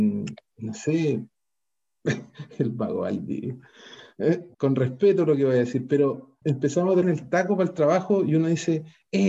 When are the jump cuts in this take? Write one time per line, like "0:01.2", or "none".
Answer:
0:04.5
0:06.4
0:07.0